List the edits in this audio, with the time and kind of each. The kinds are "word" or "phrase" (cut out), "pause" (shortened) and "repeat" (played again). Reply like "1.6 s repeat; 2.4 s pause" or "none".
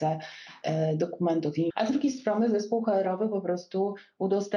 1.7 s word